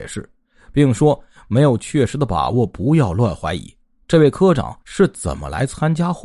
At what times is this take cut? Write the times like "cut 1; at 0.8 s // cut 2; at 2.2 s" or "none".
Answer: cut 1; at 4.8 s

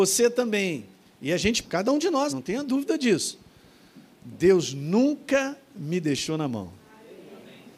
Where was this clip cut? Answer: cut 1; at 1.6 s // cut 2; at 2.3 s

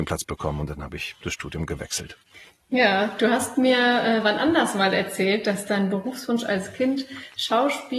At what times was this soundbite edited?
cut 1; at 2.3 s

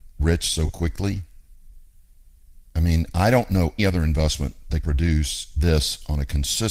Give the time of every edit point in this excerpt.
cut 1; at 3.8 s // cut 2; at 4.8 s

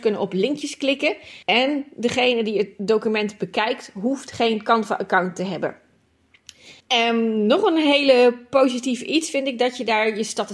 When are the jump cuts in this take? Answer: cut 1; at 1.4 s // cut 2; at 6.8 s

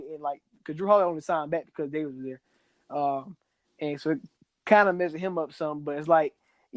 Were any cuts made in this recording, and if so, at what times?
none

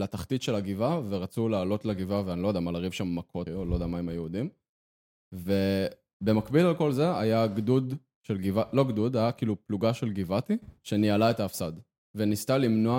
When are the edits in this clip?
cut 1; at 3.5 s // cut 2; at 10.8 s

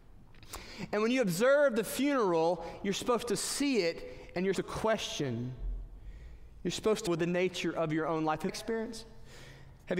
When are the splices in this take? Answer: cut 1; at 4.5 s // cut 2; at 7.1 s // cut 3; at 8.5 s

